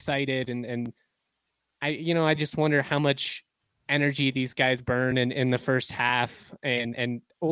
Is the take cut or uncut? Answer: uncut